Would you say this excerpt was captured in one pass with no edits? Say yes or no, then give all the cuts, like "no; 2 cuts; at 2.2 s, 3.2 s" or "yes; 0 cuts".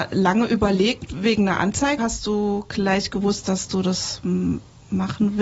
no; 1 cut; at 2.0 s